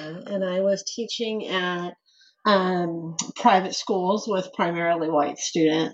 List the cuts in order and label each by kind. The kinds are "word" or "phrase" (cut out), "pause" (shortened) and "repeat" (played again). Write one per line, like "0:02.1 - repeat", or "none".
none